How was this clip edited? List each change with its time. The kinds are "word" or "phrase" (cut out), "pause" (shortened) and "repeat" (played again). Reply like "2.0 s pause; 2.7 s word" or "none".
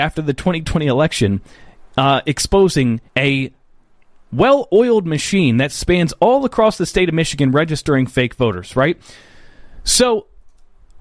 3.1 s pause